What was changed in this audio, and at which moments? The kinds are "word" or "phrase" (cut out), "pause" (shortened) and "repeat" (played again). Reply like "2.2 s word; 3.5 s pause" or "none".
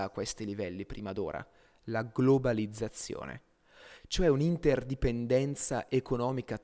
none